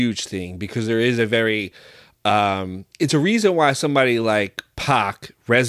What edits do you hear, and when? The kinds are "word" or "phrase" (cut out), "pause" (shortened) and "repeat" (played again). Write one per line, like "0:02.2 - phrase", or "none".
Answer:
none